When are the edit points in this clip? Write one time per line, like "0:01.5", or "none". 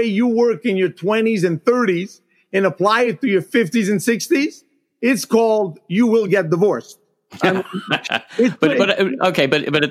none